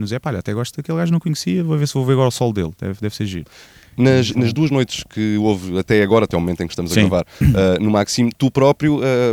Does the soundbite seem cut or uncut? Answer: uncut